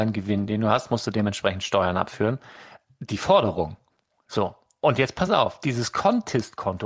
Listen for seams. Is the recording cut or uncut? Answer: uncut